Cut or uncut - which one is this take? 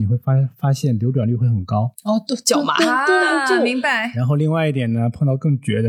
uncut